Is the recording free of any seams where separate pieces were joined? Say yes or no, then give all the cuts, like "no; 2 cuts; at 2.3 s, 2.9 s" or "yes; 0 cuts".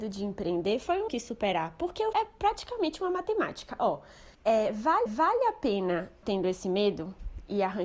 no; 5 cuts; at 1.1 s, 2.1 s, 4.3 s, 5.1 s, 6.2 s